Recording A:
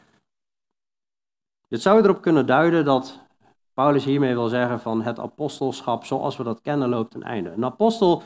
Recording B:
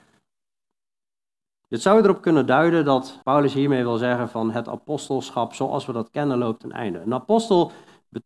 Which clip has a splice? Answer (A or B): B